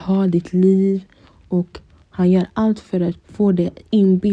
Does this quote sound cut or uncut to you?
cut